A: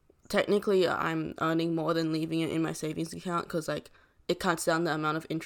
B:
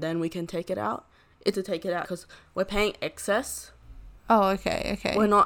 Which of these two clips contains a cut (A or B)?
B